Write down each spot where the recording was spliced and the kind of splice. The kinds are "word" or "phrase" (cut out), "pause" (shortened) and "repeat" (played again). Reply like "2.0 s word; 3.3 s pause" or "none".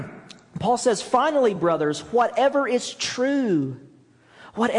none